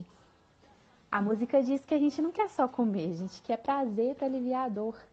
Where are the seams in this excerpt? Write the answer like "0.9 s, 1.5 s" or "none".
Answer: none